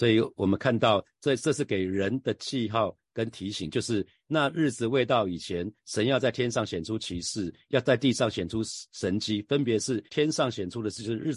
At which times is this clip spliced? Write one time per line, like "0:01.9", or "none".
0:10.1